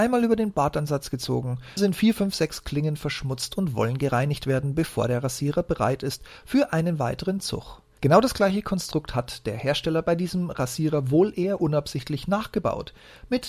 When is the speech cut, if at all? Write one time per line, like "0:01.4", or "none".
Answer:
0:01.8